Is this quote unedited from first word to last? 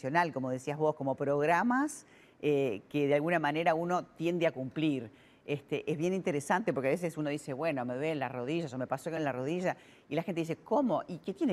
yes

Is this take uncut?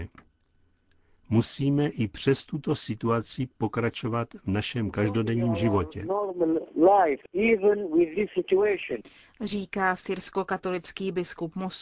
yes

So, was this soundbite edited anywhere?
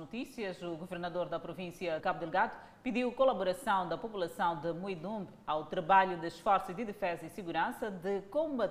yes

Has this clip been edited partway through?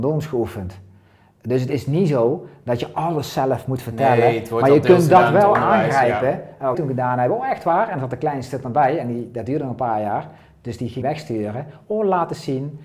yes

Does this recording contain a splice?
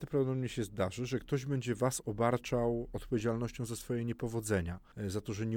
no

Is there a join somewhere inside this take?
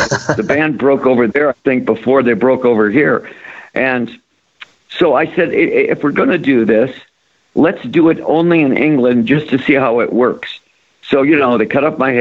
no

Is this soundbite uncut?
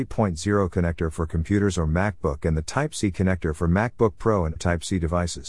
no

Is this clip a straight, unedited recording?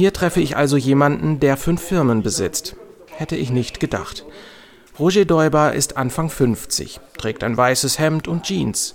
yes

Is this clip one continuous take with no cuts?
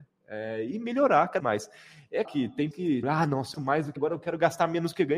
no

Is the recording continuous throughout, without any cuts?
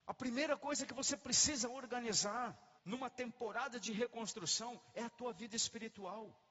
no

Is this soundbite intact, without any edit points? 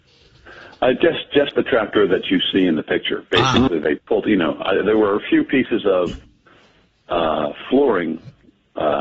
yes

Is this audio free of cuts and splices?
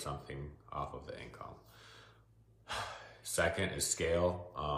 yes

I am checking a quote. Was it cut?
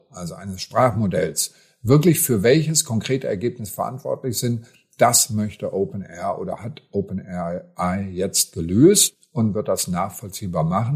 no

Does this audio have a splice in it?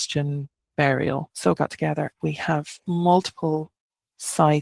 yes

